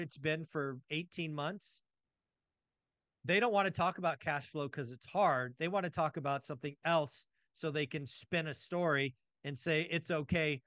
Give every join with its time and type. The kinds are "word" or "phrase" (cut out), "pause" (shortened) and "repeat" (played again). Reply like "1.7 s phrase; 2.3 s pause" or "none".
none